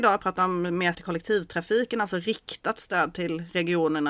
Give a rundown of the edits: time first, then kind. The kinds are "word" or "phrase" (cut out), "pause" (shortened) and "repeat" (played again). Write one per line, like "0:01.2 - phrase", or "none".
0:00.9 - word